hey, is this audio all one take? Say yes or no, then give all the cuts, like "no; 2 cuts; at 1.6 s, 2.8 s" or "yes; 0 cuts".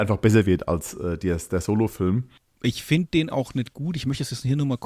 yes; 0 cuts